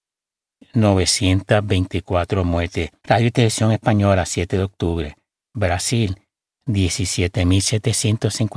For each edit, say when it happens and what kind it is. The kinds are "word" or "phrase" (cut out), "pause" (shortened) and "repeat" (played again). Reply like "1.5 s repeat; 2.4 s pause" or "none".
none